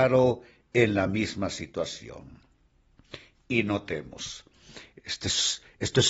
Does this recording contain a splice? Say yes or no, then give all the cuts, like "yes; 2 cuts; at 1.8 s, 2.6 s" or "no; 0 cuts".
no; 0 cuts